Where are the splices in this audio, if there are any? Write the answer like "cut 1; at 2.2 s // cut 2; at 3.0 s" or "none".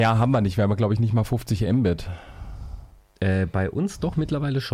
none